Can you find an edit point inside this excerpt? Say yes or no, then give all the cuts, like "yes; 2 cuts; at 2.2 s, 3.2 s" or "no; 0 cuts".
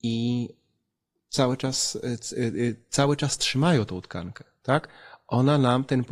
no; 0 cuts